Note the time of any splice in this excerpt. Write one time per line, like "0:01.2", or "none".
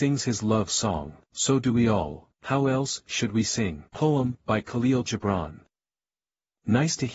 0:01.3
0:02.3
0:03.9